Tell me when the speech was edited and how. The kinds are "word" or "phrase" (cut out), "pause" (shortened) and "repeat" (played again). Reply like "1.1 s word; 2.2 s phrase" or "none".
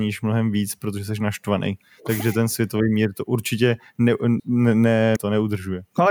4.4 s phrase; 5.2 s word